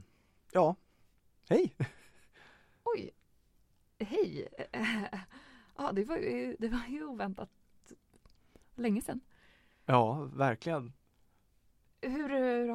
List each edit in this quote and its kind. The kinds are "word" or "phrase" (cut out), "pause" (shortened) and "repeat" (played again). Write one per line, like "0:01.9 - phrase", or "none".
none